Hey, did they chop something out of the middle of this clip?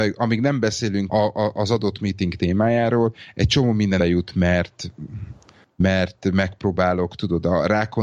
yes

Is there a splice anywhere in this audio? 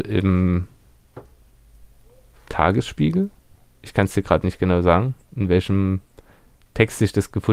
no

